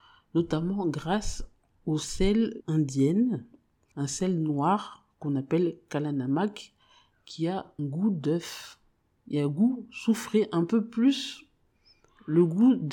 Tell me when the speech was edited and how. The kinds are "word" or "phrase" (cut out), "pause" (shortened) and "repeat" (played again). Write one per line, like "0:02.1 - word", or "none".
0:02.6 - word
0:07.8 - word